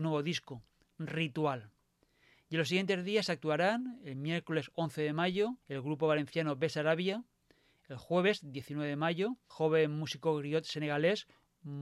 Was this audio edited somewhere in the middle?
yes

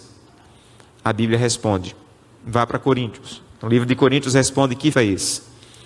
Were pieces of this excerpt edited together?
yes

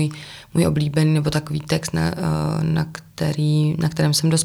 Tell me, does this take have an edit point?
no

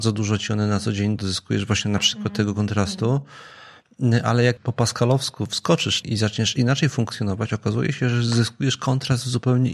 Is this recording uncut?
no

